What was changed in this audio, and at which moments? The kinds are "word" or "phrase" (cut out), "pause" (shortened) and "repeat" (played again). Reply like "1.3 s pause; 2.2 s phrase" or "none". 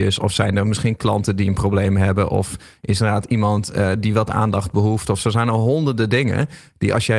none